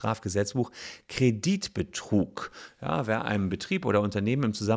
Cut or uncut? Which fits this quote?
uncut